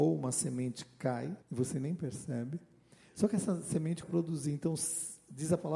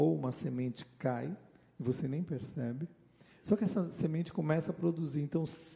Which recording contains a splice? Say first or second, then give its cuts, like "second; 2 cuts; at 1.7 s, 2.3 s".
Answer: first; 2 cuts; at 1.4 s, 4.0 s